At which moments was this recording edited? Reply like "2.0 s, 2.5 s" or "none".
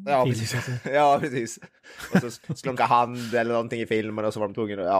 2.4 s, 2.8 s